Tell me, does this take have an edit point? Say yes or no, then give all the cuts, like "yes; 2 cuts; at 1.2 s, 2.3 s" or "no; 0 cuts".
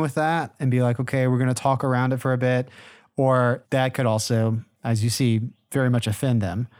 no; 0 cuts